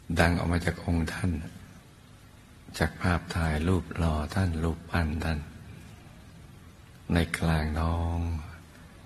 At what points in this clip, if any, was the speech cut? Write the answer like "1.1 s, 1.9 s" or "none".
none